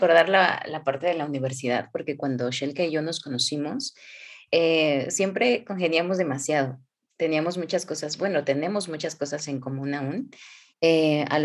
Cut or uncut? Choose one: uncut